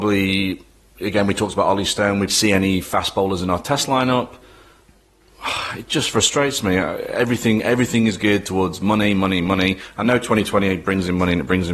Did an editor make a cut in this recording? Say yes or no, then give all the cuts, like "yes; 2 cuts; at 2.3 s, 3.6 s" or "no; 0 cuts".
yes; 1 cut; at 2.3 s